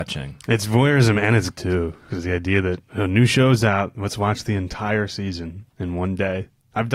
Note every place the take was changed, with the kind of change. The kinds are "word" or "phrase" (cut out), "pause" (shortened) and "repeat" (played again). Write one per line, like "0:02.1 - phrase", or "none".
0:01.5 - word
0:02.8 - pause